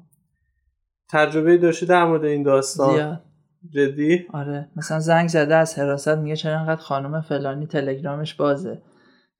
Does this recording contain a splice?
no; 0 cuts

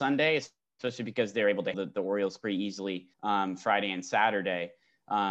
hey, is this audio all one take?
no; 2 cuts; at 1.7 s, 3.1 s

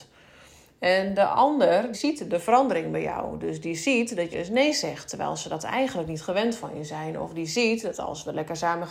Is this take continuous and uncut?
no; 2 cuts; at 1.9 s, 4.3 s

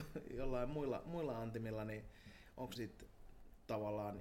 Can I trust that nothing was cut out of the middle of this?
no; 1 cut; at 2.8 s

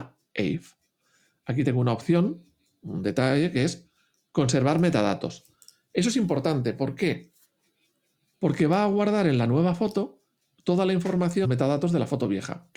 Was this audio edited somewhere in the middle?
yes; 2 cuts; at 1.6 s, 11.4 s

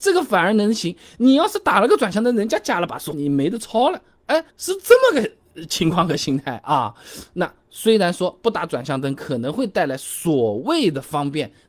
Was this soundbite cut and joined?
yes; 2 cuts; at 3.1 s, 4.5 s

